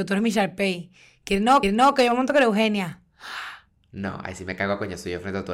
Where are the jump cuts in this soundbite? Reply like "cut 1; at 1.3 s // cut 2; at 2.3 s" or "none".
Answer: cut 1; at 1.6 s // cut 2; at 3.8 s